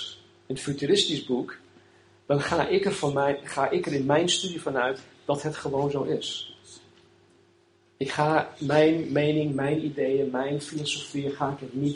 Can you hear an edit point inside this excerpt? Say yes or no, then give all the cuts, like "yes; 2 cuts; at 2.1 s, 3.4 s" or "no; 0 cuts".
no; 0 cuts